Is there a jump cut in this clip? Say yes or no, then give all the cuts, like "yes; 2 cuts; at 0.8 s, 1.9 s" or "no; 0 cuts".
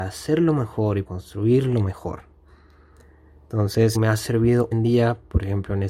yes; 3 cuts; at 1.1 s, 3.9 s, 4.7 s